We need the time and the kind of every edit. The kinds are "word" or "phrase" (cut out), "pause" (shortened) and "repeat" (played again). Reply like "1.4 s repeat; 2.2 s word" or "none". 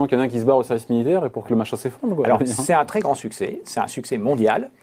none